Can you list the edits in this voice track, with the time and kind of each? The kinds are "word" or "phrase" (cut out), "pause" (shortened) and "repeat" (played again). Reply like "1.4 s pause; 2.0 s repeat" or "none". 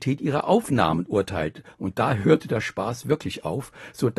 none

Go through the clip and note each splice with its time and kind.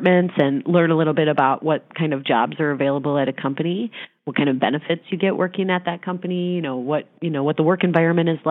none

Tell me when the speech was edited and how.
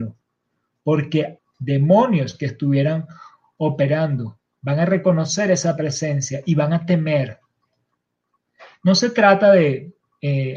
1.4 s word

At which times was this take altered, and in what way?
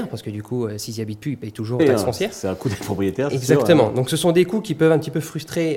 1.8 s word

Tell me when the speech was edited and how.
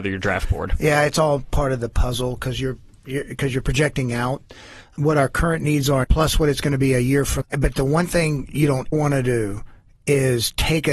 6.0 s word; 7.4 s word; 8.9 s word

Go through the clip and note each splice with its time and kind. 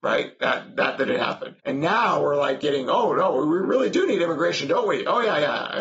1.6 s pause

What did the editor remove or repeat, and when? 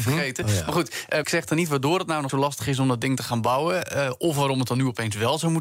1.2 s word; 2.3 s word

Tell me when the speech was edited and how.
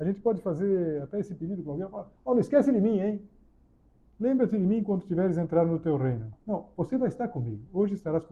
2.2 s pause; 3.6 s pause; 6.4 s pause

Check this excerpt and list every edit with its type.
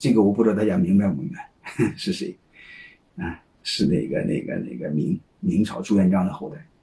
3.5 s pause

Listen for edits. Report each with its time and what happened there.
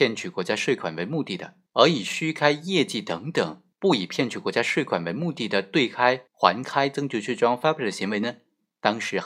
1.7 s pause; 3.7 s pause; 6.3 s pause

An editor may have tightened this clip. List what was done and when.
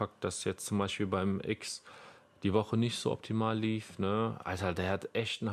none

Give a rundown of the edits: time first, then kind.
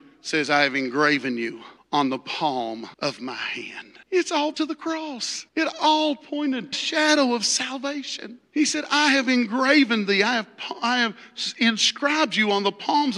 1.8 s pause; 2.9 s pause; 4.0 s pause; 4.5 s word; 5.5 s pause; 6.7 s phrase; 8.5 s pause

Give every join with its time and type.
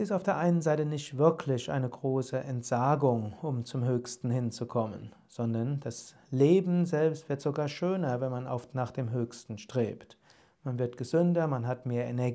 none

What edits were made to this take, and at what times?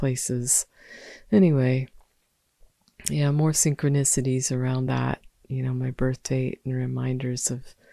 none

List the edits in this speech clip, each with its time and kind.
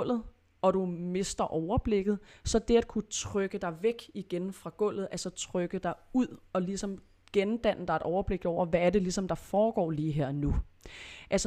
none

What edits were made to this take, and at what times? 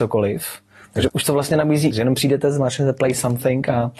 1.1 s phrase; 1.9 s word

